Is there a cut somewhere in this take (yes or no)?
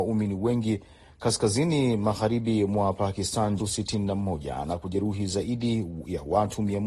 yes